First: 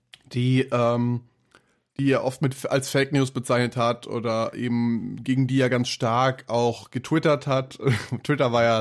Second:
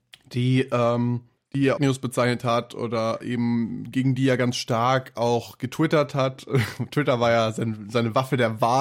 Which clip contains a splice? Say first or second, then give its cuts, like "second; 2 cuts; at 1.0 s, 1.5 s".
second; 2 cuts; at 1.4 s, 1.8 s